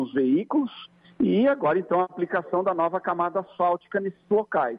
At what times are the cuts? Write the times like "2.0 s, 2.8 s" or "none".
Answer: none